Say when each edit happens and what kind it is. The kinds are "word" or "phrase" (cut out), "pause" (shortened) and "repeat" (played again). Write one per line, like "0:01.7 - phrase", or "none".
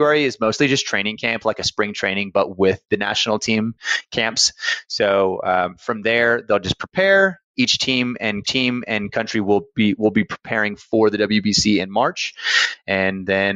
0:08.4 - repeat